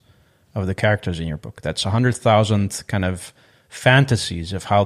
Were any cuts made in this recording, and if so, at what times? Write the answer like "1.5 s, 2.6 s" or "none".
none